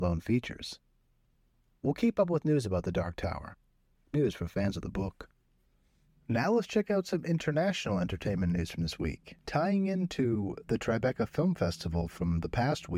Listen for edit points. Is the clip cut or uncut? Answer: cut